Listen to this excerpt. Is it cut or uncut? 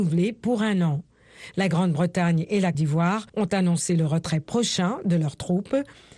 cut